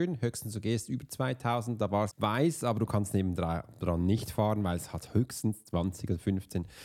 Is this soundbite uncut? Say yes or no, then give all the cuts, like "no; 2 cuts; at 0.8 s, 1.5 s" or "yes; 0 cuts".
no; 1 cut; at 2.1 s